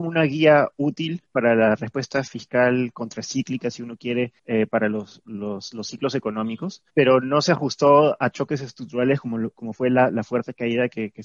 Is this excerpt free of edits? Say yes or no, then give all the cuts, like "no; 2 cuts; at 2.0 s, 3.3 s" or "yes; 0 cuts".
no; 3 cuts; at 1.3 s, 4.4 s, 6.9 s